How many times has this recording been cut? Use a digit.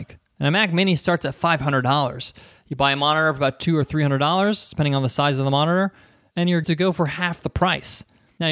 1